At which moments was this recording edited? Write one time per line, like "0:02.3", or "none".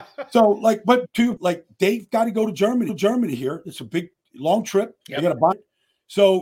0:01.0
0:01.4
0:02.9
0:05.0
0:05.5